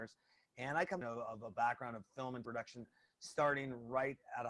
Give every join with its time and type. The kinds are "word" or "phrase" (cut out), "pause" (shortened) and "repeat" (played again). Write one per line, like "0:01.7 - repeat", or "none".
0:01.0 - phrase
0:02.4 - word